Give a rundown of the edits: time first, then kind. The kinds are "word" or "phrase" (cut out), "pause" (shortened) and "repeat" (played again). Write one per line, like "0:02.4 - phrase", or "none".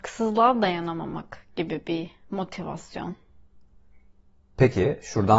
none